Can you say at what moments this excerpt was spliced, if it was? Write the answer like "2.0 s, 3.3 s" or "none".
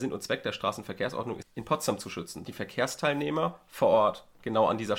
1.4 s, 2.5 s